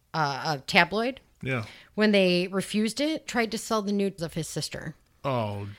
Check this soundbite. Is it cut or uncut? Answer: cut